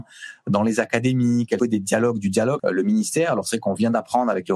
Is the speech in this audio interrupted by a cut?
yes; 2 cuts; at 1.6 s, 2.6 s

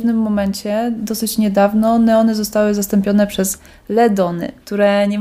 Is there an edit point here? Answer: no; 0 cuts

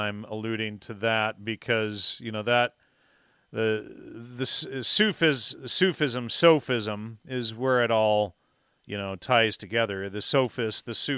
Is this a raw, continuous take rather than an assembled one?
yes; 0 cuts

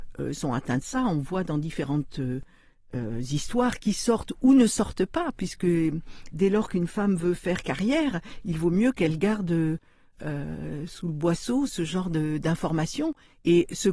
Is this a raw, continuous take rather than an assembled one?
yes; 0 cuts

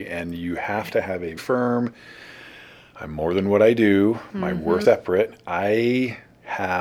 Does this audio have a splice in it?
yes; 2 cuts; at 1.4 s, 4.8 s

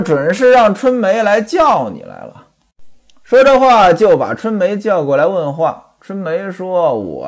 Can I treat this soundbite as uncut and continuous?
yes; 0 cuts

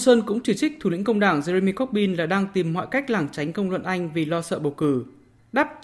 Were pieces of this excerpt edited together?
no; 0 cuts

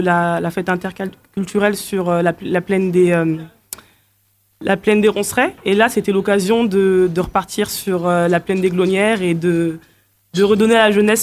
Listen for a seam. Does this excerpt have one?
no; 0 cuts

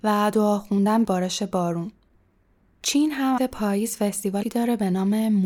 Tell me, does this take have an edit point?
yes; 3 cuts; at 1.0 s, 3.4 s, 4.4 s

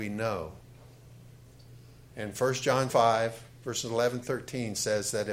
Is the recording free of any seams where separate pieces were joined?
no; 2 cuts; at 2.9 s, 4.2 s

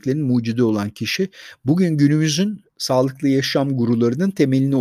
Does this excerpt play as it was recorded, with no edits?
yes; 0 cuts

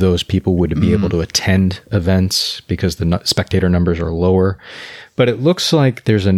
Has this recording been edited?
no; 0 cuts

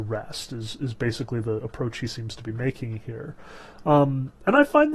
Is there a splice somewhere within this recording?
no; 0 cuts

